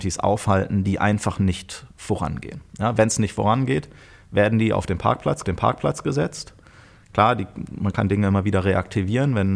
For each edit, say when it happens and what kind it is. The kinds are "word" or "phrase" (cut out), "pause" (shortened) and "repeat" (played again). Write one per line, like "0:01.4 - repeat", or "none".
0:05.4 - repeat